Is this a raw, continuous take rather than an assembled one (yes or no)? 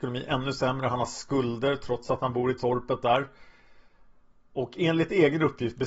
yes